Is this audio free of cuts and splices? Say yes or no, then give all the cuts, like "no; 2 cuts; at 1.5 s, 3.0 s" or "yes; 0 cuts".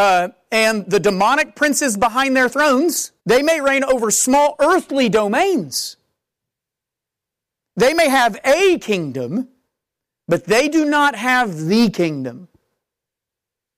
no; 1 cut; at 3.2 s